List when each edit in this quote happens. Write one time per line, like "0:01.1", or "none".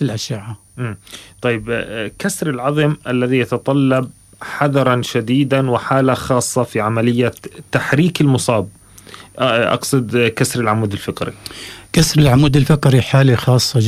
none